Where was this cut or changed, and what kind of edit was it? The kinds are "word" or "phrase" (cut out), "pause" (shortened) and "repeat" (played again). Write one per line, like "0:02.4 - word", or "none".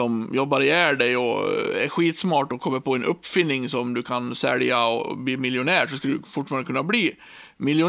none

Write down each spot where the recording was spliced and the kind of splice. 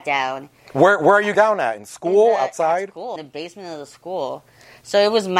0:01.3 - word
0:03.2 - word

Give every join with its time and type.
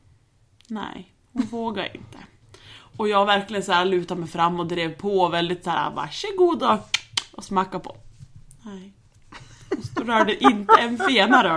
none

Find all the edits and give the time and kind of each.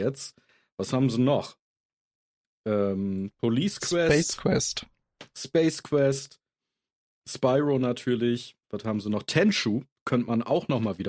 0:08.6 - pause

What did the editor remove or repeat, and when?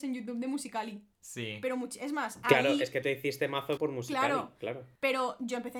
0:03.0 - word
0:03.8 - phrase

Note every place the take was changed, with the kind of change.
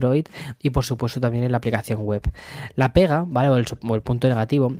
none

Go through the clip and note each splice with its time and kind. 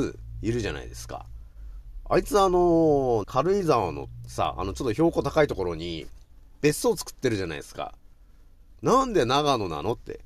0:03.2 - phrase

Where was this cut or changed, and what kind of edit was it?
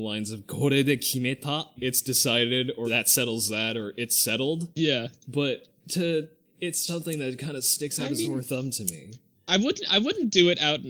0:01.8 - word
0:02.8 - word
0:06.9 - word
0:08.2 - word

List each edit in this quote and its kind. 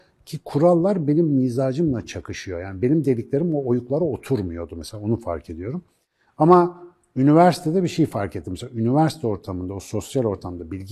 none

